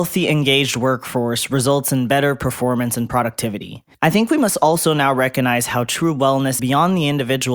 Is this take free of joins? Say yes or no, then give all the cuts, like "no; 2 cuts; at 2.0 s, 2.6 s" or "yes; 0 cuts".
no; 2 cuts; at 3.9 s, 6.6 s